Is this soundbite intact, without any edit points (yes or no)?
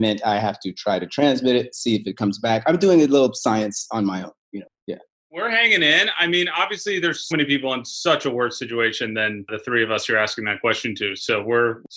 no